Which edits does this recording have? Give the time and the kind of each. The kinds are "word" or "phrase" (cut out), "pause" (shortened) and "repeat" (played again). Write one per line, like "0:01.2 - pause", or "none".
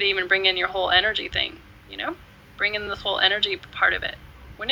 none